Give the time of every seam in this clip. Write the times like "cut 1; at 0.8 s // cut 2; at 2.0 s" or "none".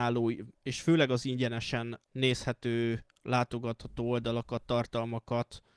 cut 1; at 2.1 s